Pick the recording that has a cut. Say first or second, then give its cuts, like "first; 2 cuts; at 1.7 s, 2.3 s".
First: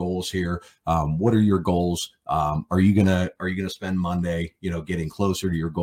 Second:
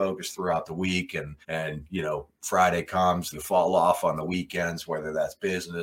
second; 2 cuts; at 1.4 s, 3.3 s